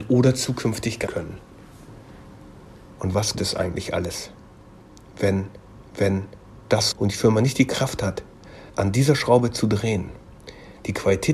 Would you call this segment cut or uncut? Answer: cut